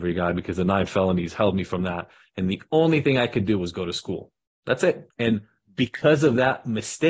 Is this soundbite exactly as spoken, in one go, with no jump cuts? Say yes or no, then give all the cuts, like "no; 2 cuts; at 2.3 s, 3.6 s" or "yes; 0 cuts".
yes; 0 cuts